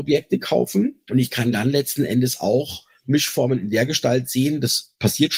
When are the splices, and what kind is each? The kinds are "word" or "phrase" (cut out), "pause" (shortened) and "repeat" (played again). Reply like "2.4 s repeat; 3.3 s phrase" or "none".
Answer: none